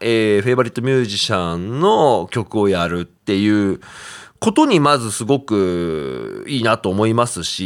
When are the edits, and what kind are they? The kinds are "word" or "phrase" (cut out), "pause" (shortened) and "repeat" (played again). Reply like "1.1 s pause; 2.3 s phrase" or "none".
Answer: none